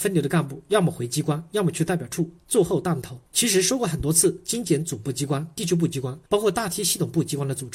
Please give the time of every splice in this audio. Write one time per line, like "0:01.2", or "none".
0:03.3
0:06.3